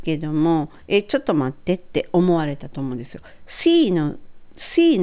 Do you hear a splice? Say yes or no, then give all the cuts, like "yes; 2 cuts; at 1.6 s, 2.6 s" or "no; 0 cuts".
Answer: no; 0 cuts